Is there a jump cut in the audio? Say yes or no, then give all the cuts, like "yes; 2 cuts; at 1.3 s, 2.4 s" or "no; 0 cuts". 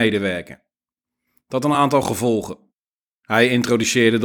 no; 0 cuts